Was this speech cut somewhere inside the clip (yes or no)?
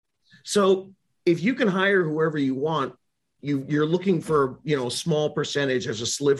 no